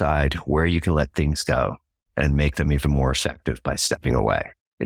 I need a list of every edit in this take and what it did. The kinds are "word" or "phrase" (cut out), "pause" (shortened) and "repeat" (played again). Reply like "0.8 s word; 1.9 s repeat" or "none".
none